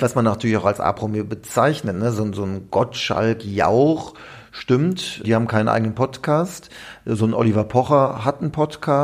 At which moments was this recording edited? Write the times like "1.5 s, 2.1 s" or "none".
5.2 s